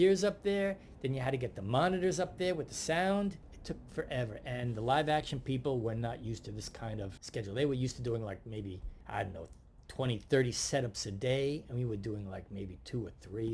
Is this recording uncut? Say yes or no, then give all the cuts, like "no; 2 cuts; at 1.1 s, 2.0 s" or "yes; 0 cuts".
yes; 0 cuts